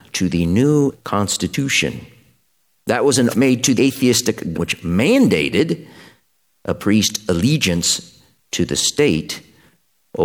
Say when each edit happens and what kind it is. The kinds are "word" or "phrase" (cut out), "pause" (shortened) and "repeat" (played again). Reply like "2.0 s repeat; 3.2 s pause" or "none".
0.9 s word; 3.3 s word; 3.8 s word; 4.5 s word